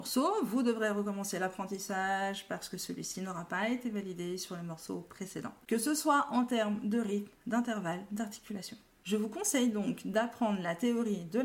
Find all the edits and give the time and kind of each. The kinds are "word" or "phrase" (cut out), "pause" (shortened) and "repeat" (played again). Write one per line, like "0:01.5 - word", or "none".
none